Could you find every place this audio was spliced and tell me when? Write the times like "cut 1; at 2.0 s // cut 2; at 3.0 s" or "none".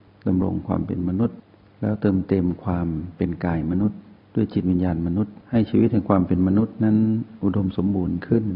cut 1; at 5.4 s